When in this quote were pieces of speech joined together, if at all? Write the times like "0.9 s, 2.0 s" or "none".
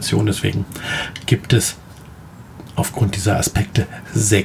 none